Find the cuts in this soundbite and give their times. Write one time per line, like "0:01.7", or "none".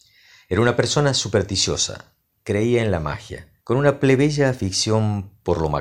0:03.6

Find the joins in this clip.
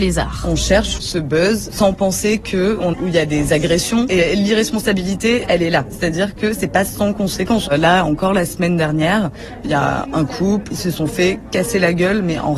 0:01.0
0:02.9
0:10.7

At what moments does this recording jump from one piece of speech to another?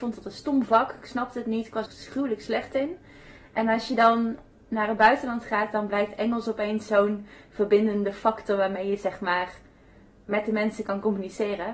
0:01.9

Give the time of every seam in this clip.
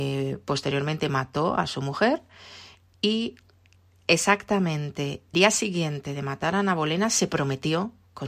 0:05.3

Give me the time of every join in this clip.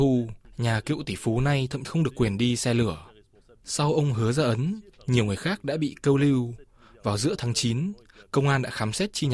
0:01.8

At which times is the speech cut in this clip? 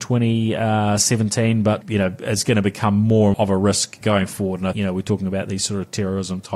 0:01.8
0:03.3
0:04.0
0:04.7

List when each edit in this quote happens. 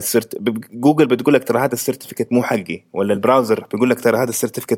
none

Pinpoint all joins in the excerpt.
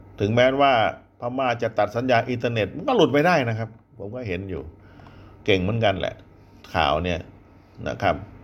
none

